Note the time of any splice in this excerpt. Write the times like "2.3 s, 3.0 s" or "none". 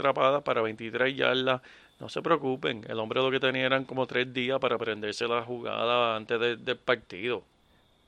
none